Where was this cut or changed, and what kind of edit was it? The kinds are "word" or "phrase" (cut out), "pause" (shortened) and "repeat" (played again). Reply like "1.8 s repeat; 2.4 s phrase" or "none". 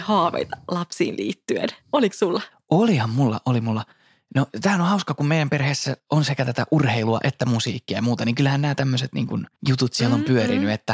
2.5 s pause; 9.6 s pause